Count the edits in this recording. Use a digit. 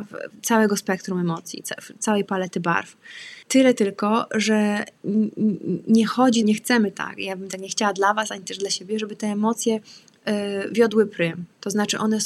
2